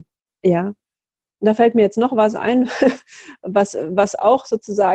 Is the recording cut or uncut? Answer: uncut